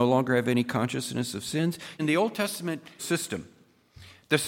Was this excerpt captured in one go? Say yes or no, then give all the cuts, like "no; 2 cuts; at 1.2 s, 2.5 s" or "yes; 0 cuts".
no; 2 cuts; at 2.0 s, 3.0 s